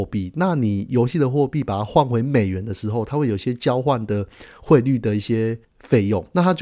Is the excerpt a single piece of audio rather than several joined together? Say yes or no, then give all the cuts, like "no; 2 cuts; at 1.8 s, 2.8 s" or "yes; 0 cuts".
no; 1 cut; at 5.6 s